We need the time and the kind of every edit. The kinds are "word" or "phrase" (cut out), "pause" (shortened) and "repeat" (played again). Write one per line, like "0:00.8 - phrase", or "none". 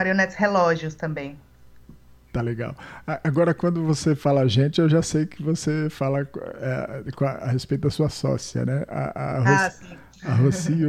none